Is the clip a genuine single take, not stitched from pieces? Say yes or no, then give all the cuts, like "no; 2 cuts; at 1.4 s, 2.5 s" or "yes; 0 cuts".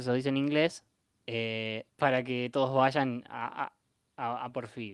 no; 1 cut; at 1.9 s